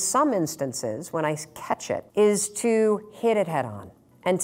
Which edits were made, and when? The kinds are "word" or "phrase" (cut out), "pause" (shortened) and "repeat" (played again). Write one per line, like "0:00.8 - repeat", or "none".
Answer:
0:02.1 - pause